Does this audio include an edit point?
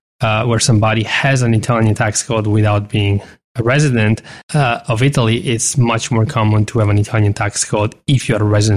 yes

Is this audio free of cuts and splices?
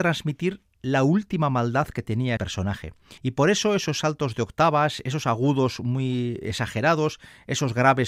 no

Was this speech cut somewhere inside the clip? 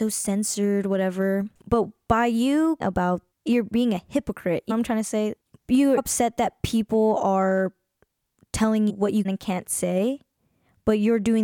yes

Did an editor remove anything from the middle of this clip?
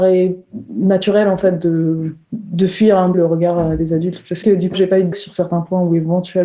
yes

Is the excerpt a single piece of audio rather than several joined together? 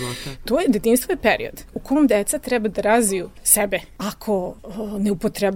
yes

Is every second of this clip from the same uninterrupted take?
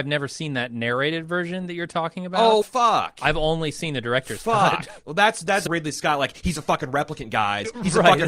no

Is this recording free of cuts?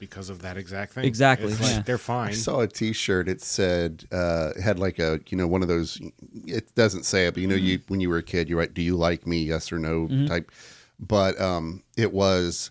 yes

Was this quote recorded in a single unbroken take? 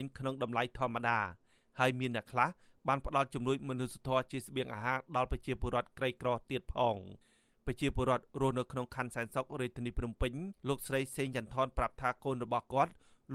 no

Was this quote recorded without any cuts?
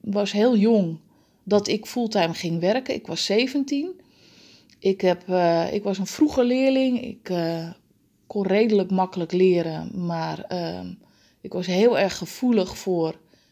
yes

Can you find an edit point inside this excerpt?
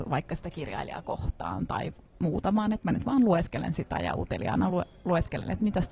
no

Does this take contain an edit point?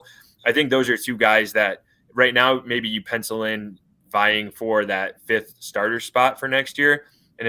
no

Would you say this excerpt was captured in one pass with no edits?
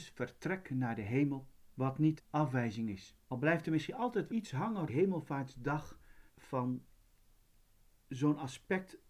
no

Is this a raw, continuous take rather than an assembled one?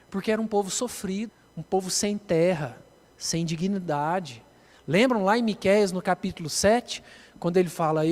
yes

